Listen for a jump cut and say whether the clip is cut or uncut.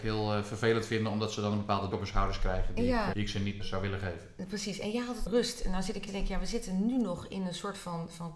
cut